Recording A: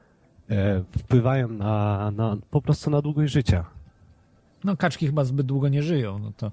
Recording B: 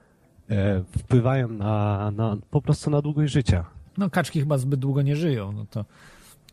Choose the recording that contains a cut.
B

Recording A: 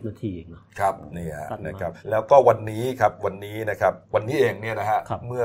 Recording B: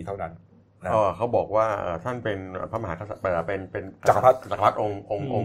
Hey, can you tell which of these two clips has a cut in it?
A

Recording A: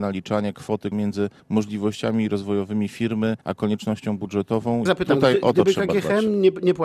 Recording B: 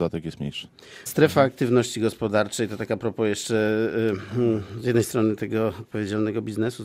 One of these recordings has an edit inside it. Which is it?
A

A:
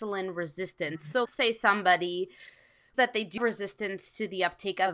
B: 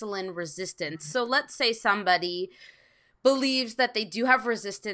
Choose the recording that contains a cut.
A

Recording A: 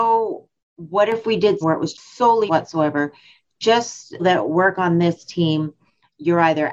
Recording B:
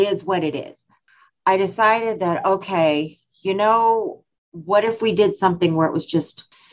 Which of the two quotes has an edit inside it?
A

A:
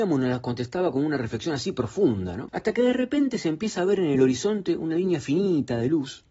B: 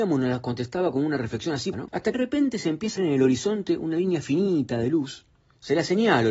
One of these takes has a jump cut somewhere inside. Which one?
B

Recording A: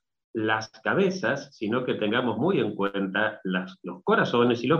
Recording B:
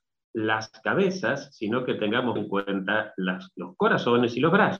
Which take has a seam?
B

